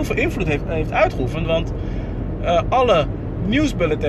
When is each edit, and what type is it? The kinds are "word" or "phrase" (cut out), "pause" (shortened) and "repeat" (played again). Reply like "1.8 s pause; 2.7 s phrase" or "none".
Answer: none